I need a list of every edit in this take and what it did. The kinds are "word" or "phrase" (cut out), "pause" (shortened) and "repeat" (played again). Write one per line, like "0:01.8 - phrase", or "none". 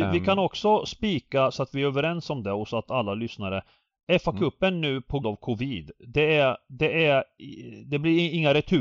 0:05.2 - word